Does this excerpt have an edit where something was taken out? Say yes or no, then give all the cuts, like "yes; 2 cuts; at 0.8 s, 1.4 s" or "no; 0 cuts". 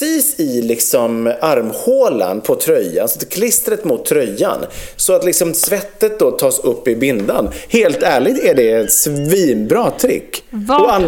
no; 0 cuts